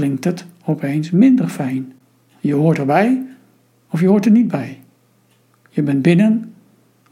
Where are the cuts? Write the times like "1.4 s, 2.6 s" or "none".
none